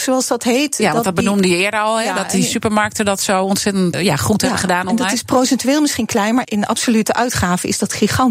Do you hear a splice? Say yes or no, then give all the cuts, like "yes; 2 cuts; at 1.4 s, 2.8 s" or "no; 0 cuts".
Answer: yes; 2 cuts; at 3.9 s, 6.4 s